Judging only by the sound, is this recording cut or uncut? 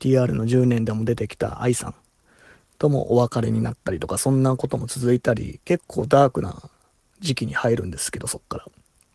uncut